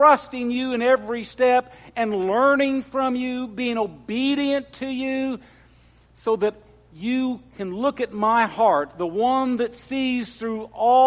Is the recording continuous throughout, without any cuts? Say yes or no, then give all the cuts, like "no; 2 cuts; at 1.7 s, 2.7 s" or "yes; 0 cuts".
yes; 0 cuts